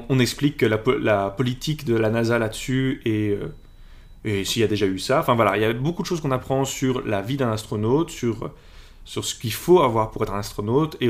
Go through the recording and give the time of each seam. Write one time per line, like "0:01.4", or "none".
none